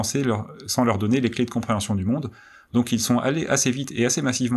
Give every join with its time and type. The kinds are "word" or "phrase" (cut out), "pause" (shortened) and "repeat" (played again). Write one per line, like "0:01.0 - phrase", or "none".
none

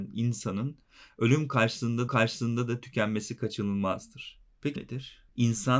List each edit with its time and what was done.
0:02.1 - repeat
0:04.8 - phrase

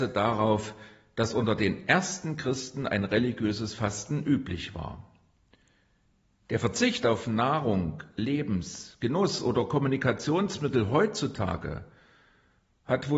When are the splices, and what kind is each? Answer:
none

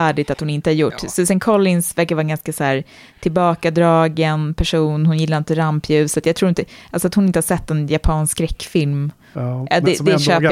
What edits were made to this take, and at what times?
none

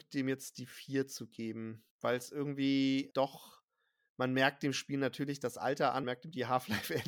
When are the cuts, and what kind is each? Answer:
0:01.9 - pause
0:03.1 - word
0:06.0 - word

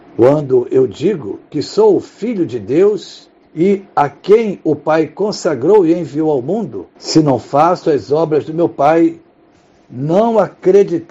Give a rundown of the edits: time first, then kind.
0:03.4 - pause
0:06.9 - pause

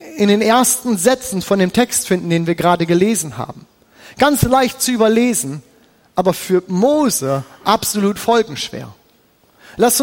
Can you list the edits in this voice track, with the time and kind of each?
none

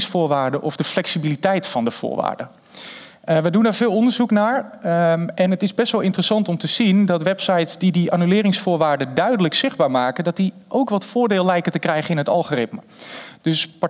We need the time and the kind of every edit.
none

